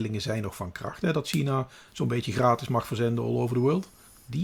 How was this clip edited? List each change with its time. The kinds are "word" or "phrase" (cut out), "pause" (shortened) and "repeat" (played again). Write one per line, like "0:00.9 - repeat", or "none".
none